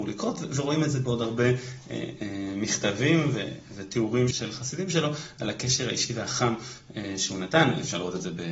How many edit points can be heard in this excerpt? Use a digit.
1